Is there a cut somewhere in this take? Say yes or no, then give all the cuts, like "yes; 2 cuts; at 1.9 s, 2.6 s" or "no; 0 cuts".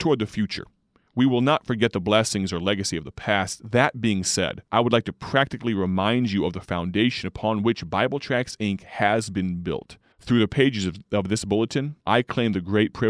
yes; 3 cuts; at 4.7 s, 10.1 s, 12.0 s